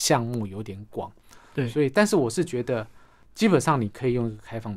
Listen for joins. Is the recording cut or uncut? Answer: uncut